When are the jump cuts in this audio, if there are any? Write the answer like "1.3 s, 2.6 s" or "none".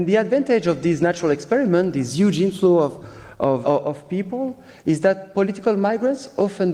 3.6 s